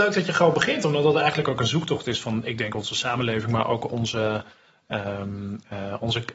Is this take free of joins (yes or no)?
yes